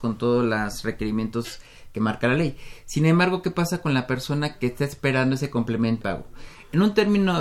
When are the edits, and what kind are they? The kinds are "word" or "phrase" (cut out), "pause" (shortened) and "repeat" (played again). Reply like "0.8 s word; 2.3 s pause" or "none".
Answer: 6.0 s word

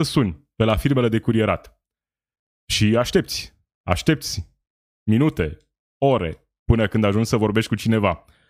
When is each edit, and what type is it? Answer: none

